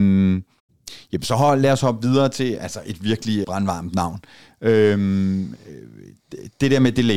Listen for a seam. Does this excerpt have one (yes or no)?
yes